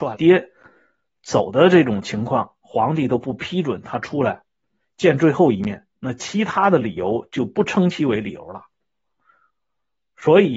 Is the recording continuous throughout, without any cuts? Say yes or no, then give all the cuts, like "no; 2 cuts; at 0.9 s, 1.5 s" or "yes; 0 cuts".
yes; 0 cuts